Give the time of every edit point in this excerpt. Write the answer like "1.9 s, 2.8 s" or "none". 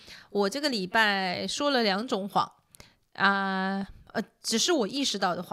none